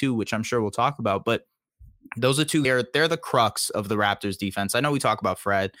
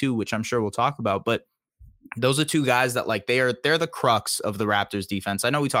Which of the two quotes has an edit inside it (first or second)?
first